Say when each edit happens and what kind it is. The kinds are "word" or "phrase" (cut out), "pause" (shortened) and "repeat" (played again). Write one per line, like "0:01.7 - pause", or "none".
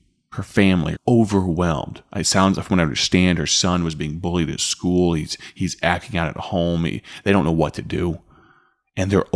0:00.9 - word